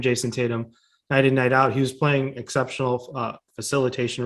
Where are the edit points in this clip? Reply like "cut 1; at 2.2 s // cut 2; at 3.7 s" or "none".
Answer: none